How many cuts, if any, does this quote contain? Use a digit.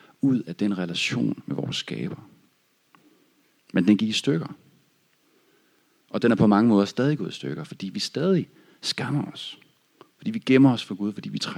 0